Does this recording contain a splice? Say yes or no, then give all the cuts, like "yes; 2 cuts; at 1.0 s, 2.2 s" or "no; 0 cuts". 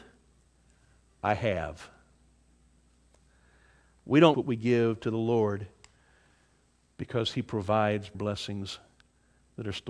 yes; 2 cuts; at 4.3 s, 8.1 s